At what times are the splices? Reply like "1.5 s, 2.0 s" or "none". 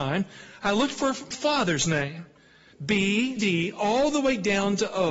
1.3 s, 2.7 s, 3.4 s